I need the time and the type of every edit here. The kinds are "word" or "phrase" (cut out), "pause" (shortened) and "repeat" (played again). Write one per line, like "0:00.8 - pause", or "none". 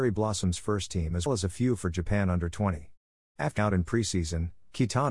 0:01.3 - word
0:03.6 - word